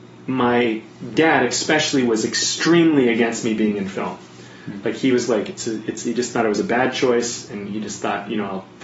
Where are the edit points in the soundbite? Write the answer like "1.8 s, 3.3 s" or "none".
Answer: none